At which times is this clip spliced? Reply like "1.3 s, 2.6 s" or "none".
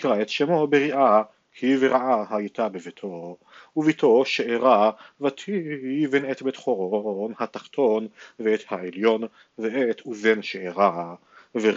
none